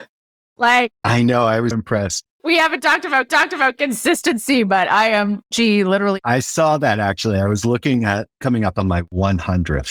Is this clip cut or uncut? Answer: cut